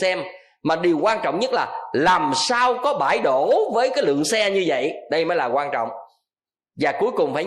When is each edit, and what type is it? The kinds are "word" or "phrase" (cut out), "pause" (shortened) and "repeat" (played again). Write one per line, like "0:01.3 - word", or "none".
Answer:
none

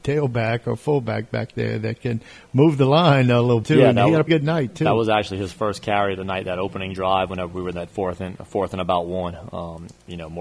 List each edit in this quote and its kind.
0:03.6 - word
0:04.3 - word

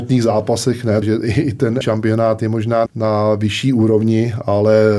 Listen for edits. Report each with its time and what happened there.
0:01.0 - phrase
0:01.8 - word
0:02.9 - word

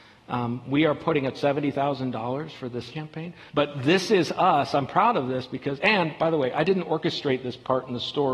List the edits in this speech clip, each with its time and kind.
0:01.3 - phrase
0:02.9 - word

